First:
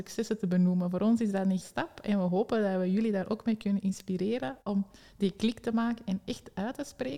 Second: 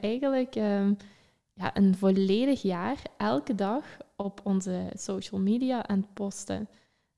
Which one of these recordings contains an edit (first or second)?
first